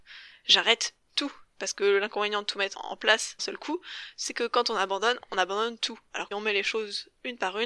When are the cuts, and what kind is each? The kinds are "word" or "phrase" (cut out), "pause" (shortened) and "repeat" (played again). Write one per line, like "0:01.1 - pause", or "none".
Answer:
0:02.7 - word
0:03.4 - word
0:06.3 - word